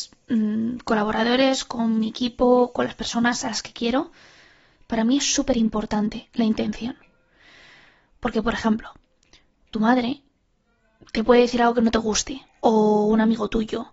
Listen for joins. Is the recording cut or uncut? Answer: uncut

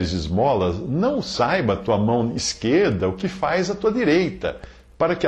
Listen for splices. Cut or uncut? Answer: uncut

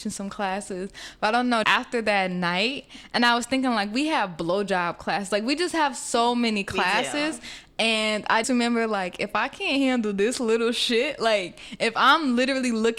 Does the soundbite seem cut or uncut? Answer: cut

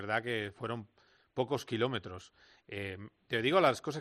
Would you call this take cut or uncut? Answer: uncut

